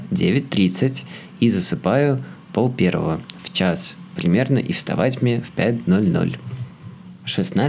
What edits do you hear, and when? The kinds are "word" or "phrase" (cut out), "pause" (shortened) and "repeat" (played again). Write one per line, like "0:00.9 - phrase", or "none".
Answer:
none